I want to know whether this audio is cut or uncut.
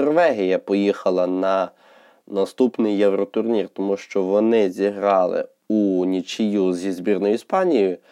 uncut